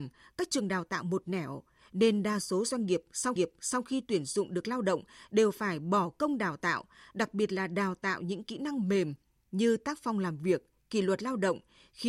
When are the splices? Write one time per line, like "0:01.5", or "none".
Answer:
0:03.4